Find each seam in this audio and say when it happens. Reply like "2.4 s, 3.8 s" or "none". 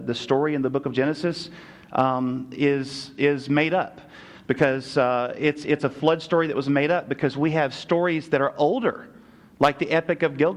none